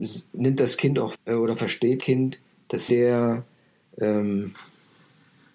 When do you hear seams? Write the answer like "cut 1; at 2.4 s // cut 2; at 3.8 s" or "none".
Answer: cut 1; at 1.1 s // cut 2; at 2.0 s // cut 3; at 2.9 s